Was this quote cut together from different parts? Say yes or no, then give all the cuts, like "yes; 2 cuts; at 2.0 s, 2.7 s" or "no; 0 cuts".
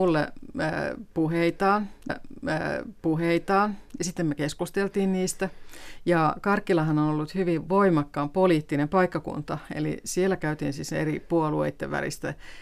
yes; 1 cut; at 2.1 s